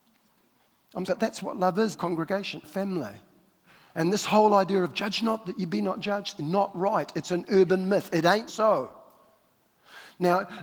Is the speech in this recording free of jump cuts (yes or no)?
no